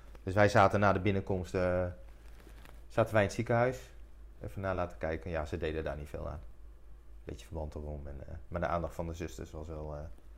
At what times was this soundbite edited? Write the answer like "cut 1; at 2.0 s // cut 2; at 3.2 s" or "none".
none